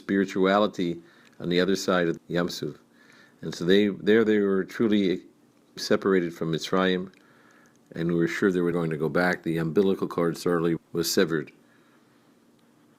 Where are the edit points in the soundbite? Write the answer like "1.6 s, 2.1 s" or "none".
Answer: 2.2 s, 5.8 s, 8.7 s, 10.8 s